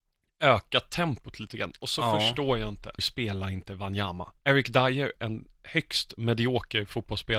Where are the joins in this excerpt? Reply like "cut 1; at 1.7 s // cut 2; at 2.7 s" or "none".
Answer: cut 1; at 3.0 s // cut 2; at 4.4 s // cut 3; at 5.2 s